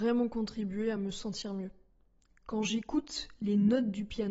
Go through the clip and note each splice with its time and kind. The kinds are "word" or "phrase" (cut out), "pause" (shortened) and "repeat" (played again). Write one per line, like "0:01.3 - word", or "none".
none

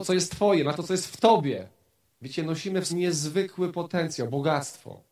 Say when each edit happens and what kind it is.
0:02.1 - pause
0:02.9 - word

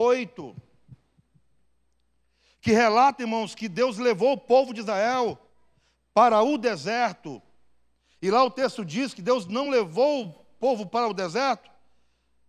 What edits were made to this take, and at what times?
none

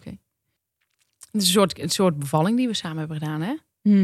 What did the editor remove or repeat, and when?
none

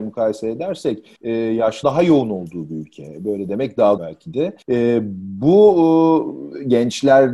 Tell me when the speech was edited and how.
0:01.2 - pause
0:01.8 - word
0:04.0 - word
0:04.6 - pause

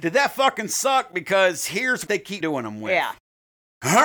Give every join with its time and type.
0:02.1 - word
0:02.4 - word

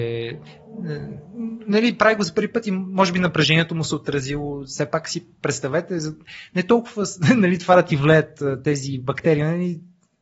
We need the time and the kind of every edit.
none

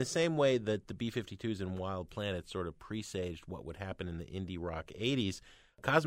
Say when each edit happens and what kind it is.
none

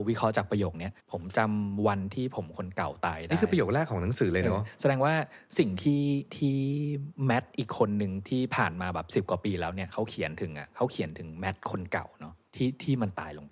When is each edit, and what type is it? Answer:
0:01.0 - pause

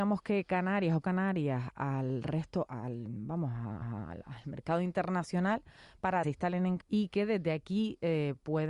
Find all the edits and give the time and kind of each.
0:01.0 - word
0:02.7 - word
0:03.8 - repeat
0:06.2 - phrase
0:06.8 - word

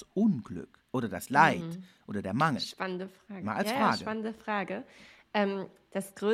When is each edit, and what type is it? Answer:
none

